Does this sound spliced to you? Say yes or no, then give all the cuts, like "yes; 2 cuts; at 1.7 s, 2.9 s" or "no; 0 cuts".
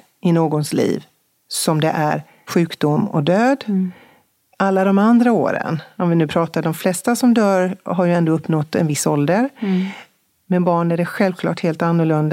no; 0 cuts